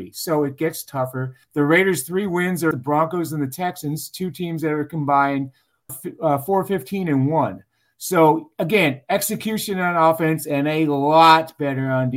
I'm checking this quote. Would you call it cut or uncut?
cut